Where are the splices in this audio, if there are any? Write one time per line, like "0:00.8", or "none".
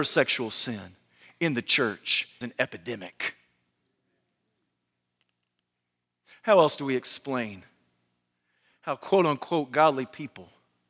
0:02.4